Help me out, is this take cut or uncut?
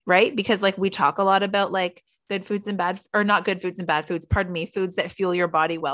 uncut